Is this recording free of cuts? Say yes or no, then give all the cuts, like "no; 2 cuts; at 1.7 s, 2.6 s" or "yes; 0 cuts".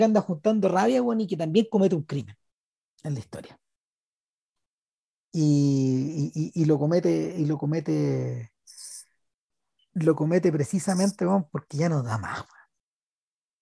yes; 0 cuts